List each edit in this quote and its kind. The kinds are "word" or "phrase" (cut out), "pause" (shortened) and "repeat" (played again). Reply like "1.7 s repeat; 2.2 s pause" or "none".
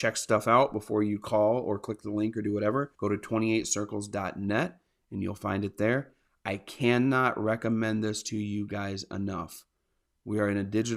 2.9 s pause

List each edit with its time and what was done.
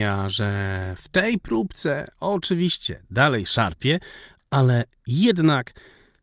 none

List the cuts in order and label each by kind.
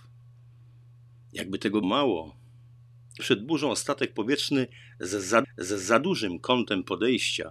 1.8 s word; 3.2 s word; 5.4 s repeat

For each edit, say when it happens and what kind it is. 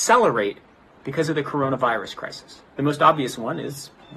2.7 s pause

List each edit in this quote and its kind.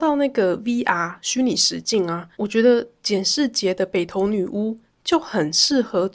2.3 s pause

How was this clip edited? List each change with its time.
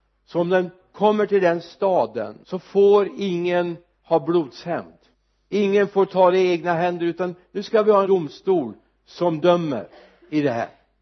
2.4 s pause; 5.1 s pause; 8.0 s phrase

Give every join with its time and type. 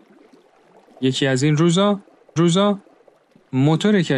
2.4 s repeat

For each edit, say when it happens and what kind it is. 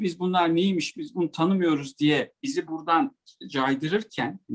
none

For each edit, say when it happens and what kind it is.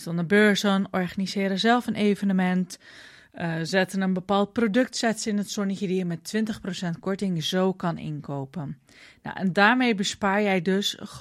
none

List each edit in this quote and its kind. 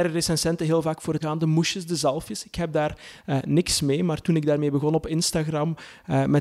1.2 s word

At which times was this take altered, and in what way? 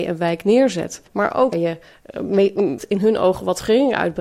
1.1 s pause; 1.5 s word; 2.8 s word

